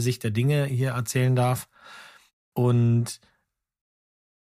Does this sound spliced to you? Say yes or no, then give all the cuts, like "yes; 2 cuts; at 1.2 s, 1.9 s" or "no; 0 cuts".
no; 0 cuts